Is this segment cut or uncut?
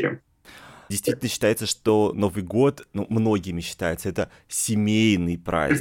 uncut